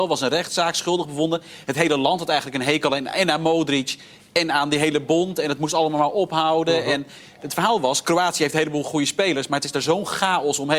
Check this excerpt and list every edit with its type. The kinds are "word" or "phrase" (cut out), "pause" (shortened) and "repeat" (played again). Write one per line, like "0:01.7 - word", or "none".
none